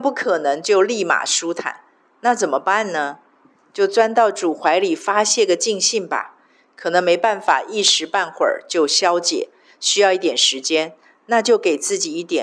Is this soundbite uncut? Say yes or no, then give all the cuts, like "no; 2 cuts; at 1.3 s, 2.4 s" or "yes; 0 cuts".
yes; 0 cuts